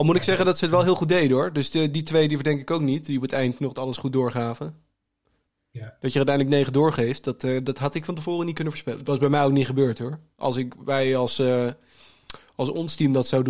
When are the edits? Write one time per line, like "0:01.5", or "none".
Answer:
none